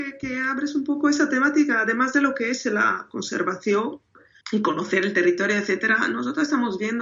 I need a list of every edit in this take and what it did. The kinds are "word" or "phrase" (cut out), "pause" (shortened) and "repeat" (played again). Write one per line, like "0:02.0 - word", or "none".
0:04.4 - word